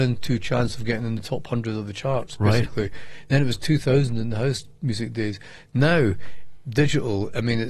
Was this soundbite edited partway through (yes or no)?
no